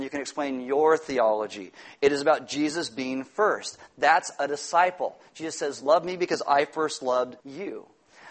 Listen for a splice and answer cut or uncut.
cut